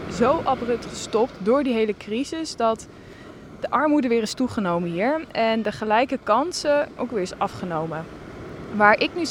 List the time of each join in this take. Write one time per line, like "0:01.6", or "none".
0:07.0